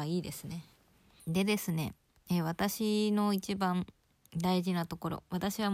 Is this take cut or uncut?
uncut